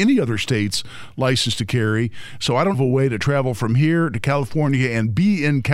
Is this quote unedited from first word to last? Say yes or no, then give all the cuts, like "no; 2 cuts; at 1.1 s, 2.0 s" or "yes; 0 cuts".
no; 1 cut; at 2.7 s